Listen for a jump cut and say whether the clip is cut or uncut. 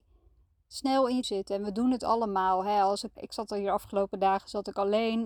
cut